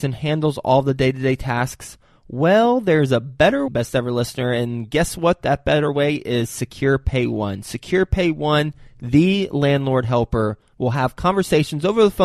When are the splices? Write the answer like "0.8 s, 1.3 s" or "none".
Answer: 3.7 s